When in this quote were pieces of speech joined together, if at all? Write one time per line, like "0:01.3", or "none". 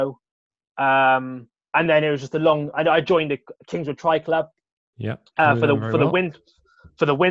none